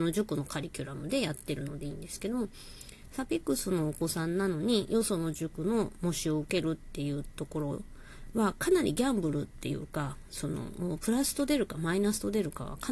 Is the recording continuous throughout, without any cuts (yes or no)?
yes